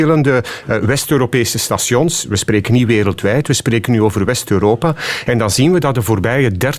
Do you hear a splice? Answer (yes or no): no